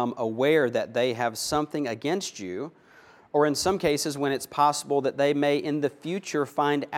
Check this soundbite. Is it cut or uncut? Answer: uncut